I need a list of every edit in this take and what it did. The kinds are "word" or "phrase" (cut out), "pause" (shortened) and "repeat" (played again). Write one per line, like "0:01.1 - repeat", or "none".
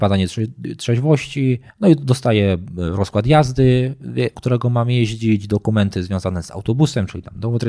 0:01.7 - pause
0:04.3 - word

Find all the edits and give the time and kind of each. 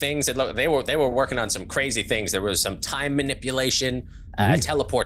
none

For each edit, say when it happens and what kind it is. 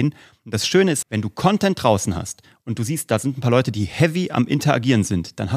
0:01.0 - word

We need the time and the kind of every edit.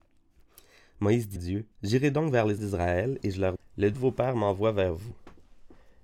0:01.4 - word
0:01.7 - pause
0:02.6 - word
0:03.6 - word
0:03.9 - word

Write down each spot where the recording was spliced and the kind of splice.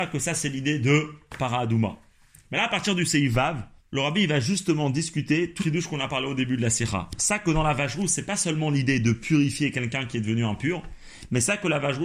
0:03.8 - pause
0:05.6 - word

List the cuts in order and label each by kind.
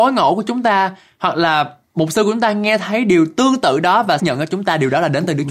0:04.2 - word

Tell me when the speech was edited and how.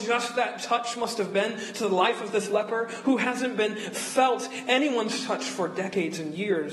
none

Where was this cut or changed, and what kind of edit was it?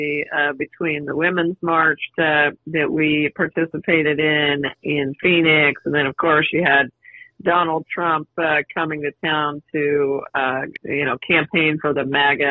0:02.1 - word

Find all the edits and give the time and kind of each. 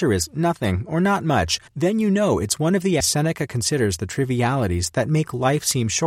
0:01.7 - pause
0:03.0 - word

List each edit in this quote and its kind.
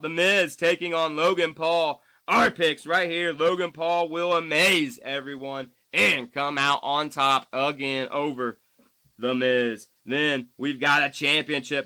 none

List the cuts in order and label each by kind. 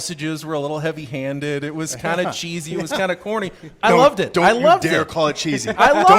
none

